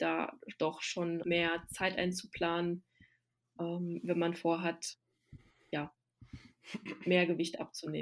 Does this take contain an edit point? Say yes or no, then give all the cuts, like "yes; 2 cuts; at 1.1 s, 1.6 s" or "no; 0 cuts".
yes; 1 cut; at 1.2 s